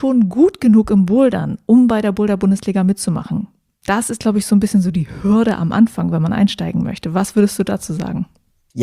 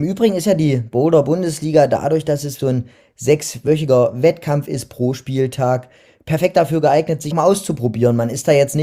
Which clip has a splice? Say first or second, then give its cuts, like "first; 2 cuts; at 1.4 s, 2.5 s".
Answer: second; 2 cuts; at 2.6 s, 7.3 s